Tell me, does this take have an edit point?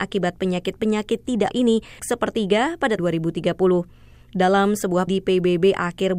yes; 4 cuts; at 1.5 s, 2.0 s, 3.0 s, 5.1 s

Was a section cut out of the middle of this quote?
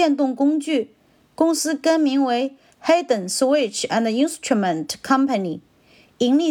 no; 0 cuts

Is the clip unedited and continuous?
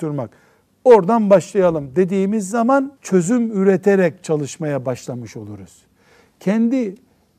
no; 1 cut; at 3.0 s

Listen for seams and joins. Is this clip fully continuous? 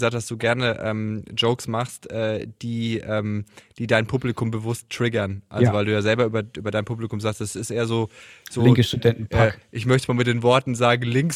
yes; 0 cuts

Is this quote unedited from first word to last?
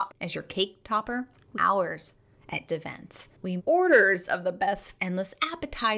no; 4 cuts; at 1.5 s, 2.7 s, 3.6 s, 5.0 s

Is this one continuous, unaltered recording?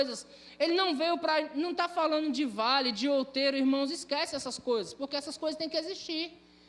yes; 0 cuts

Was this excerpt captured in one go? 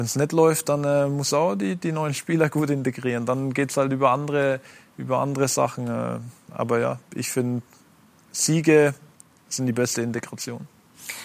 yes; 0 cuts

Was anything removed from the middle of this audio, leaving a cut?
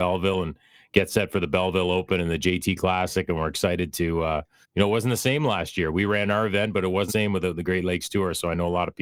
yes; 2 cuts; at 4.6 s, 7.1 s

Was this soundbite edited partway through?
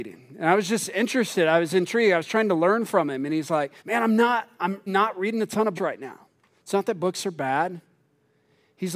yes; 4 cuts; at 3.8 s, 4.9 s, 5.8 s, 6.5 s

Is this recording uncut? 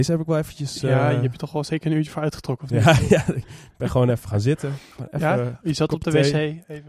yes; 0 cuts

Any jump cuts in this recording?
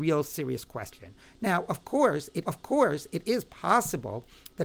yes; 1 cut; at 2.4 s

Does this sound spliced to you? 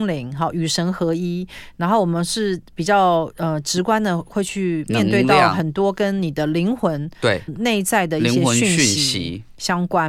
yes; 1 cut; at 7.5 s

